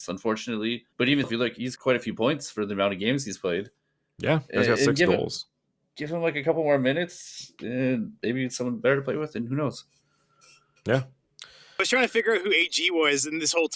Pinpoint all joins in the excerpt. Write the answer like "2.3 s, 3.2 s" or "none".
0.9 s, 1.2 s, 1.8 s